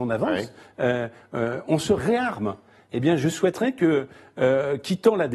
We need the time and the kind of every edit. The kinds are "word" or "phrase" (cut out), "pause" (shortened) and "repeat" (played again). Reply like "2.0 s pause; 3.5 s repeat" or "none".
none

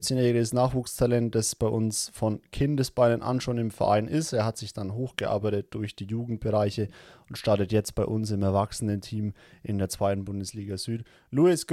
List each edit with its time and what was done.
none

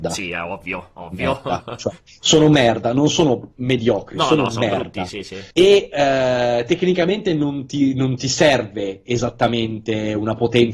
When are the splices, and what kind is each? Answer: 3.5 s pause; 5.5 s pause

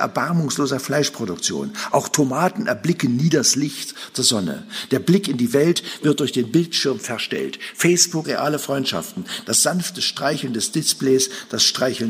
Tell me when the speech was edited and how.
8.2 s word

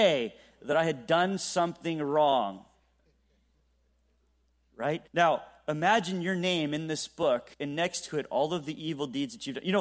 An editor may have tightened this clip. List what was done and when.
5.1 s pause; 7.5 s pause

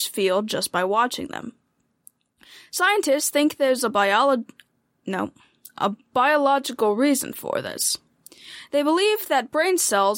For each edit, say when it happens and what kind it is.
none

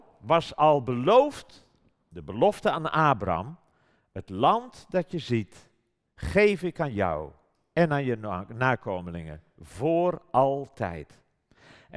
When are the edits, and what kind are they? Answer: none

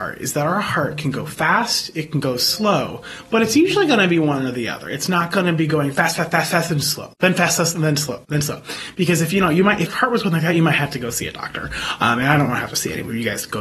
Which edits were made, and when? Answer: 9.9 s word

